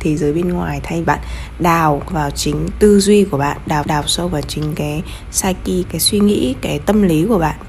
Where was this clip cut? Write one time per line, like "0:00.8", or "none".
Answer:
0:01.0
0:02.1
0:02.7
0:03.8
0:05.8